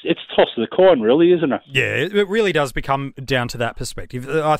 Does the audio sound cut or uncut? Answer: uncut